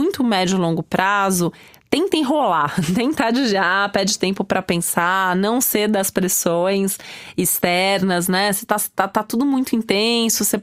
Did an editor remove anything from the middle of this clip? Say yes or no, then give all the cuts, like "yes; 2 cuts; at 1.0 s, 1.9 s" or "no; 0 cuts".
no; 0 cuts